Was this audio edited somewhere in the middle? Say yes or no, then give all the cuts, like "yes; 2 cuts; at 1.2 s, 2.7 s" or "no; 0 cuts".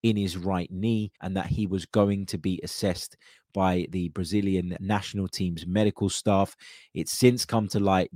yes; 2 cuts; at 1.1 s, 4.8 s